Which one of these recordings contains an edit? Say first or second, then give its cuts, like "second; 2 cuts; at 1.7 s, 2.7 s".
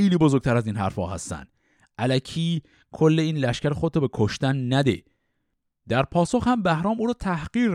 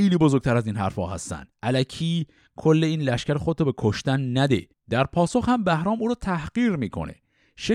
second; 2 cuts; at 1.5 s, 4.7 s